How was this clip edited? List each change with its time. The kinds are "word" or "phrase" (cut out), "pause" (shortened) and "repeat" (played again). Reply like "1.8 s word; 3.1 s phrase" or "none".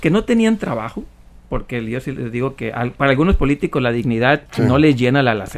4.5 s pause